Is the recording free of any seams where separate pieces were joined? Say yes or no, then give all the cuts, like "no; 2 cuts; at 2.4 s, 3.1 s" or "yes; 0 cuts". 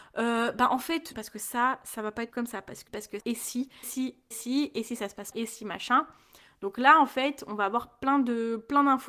no; 7 cuts; at 1.1 s, 2.3 s, 2.9 s, 3.2 s, 3.8 s, 4.3 s, 5.3 s